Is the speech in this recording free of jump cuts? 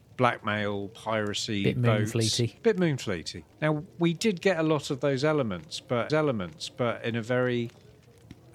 no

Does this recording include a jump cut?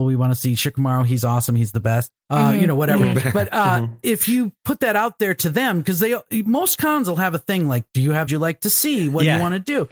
yes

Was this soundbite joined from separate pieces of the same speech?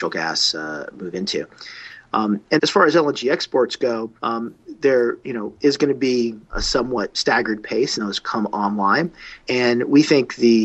yes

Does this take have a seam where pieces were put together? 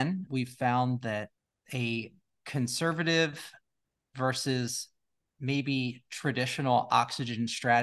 no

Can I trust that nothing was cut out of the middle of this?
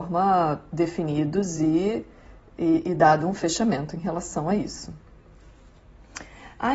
yes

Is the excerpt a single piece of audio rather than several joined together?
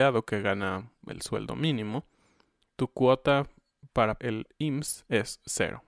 no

